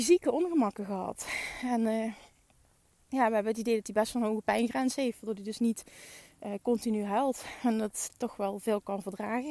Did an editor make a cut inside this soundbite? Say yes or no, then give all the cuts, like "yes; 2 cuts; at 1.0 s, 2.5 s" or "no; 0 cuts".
no; 0 cuts